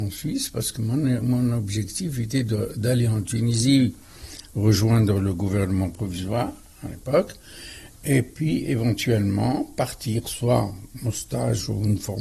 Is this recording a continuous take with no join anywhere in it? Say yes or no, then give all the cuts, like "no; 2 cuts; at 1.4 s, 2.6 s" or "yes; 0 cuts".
yes; 0 cuts